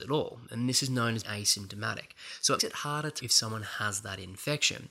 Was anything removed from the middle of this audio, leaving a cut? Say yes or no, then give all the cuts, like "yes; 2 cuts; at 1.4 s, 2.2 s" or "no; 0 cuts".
yes; 3 cuts; at 1.2 s, 2.6 s, 3.2 s